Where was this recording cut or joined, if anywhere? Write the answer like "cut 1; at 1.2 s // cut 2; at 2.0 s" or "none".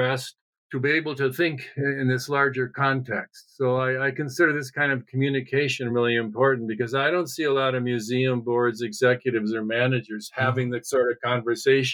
none